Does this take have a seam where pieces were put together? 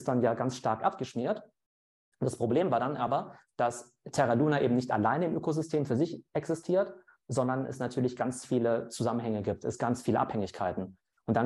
no; 0 cuts

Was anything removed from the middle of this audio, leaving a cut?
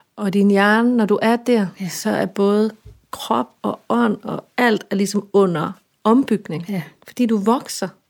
no; 0 cuts

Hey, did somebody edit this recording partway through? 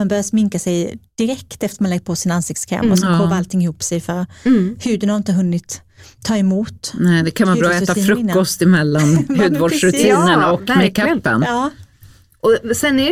no; 0 cuts

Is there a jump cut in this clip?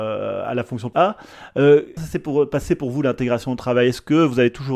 yes; 2 cuts; at 0.9 s, 2.0 s

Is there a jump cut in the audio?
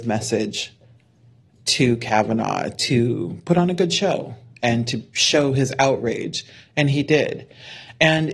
no; 0 cuts

